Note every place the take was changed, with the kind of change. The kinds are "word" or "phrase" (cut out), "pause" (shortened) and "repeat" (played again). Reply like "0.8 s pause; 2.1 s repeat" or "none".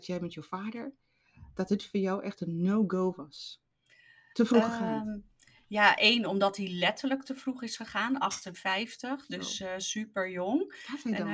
none

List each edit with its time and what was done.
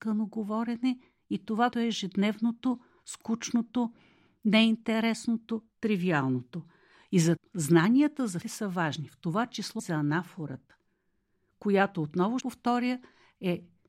1.7 s word; 7.4 s word; 8.4 s word; 9.8 s word; 12.4 s word

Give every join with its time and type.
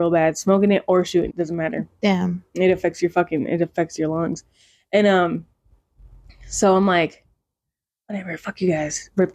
1.3 s word

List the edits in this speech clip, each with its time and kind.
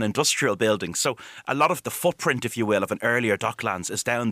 1.8 s word

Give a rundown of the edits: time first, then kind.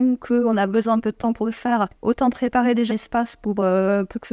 1.0 s word; 1.9 s pause; 2.9 s word

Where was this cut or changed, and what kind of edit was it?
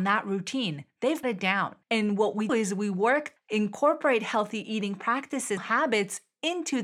1.2 s word; 1.8 s pause; 2.5 s word; 3.4 s word; 5.6 s phrase

